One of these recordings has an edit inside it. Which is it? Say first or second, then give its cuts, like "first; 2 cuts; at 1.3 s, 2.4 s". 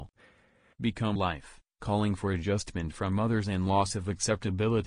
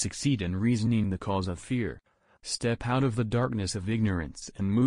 first; 1 cut; at 1.2 s